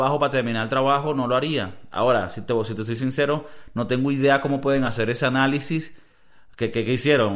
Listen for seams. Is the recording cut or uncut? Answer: uncut